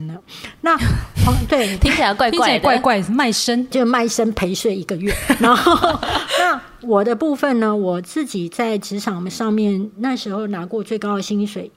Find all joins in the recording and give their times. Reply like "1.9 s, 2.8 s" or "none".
3.7 s